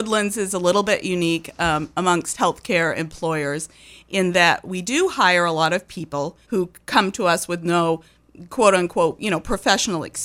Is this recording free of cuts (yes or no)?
no